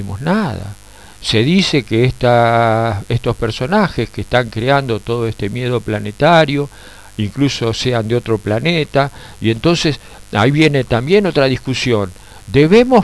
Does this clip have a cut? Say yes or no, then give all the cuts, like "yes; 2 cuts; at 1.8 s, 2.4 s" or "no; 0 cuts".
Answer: no; 0 cuts